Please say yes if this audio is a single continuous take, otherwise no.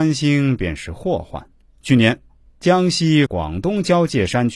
no